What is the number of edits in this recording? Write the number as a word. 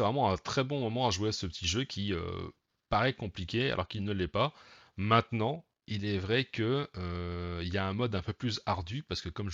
zero